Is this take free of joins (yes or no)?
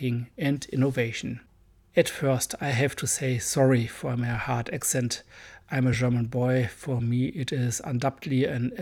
yes